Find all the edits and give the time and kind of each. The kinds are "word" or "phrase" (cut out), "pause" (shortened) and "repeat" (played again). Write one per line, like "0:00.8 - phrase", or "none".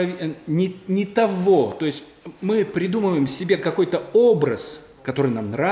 none